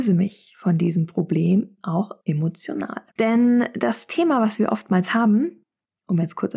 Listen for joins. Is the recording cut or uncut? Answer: cut